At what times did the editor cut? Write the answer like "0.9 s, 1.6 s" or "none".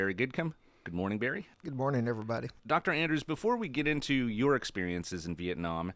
1.5 s, 2.6 s